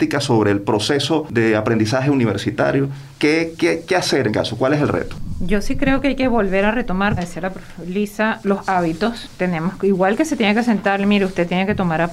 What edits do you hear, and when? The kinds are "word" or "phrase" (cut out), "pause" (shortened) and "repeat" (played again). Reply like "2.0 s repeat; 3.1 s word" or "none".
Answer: 4.3 s word; 7.2 s word; 8.4 s word